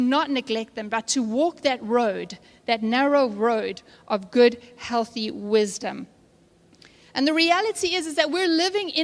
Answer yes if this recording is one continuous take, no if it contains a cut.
yes